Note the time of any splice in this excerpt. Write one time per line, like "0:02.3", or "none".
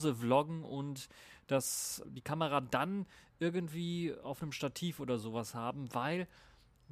0:02.0